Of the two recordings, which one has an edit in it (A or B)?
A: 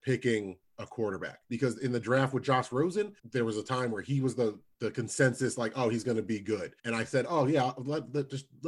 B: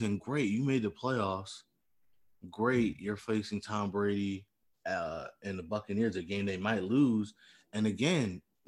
A